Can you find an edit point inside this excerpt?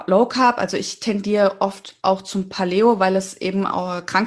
no; 0 cuts

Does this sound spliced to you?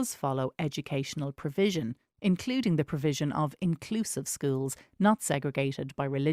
no; 0 cuts

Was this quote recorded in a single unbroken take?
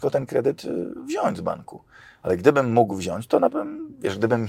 no; 1 cut; at 3.5 s

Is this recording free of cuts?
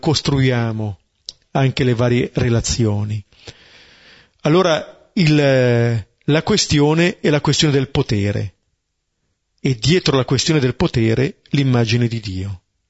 yes; 0 cuts

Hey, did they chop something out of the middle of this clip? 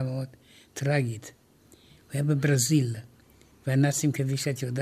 no; 0 cuts

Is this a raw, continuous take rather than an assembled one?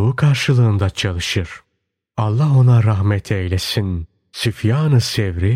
yes; 0 cuts

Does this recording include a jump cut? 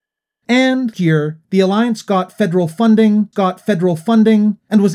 yes; 2 cuts; at 0.9 s, 3.3 s

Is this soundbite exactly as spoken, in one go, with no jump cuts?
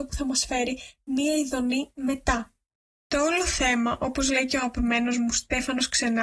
yes; 0 cuts

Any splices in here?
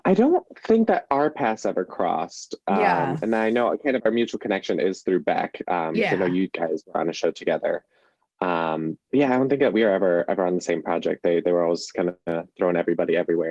no; 0 cuts

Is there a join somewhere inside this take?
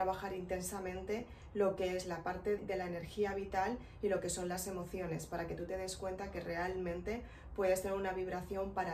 yes; 1 cut; at 2.6 s

